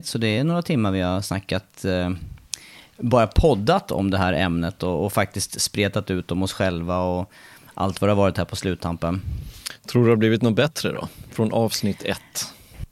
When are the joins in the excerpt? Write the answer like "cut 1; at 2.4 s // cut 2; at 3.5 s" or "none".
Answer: none